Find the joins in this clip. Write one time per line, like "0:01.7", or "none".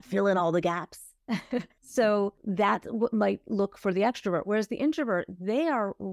0:01.8